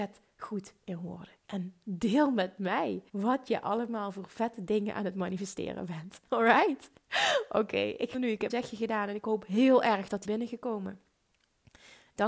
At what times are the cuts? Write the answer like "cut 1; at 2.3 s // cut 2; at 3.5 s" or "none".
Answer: cut 1; at 1.4 s // cut 2; at 3.1 s // cut 3; at 8.1 s // cut 4; at 8.5 s // cut 5; at 10.2 s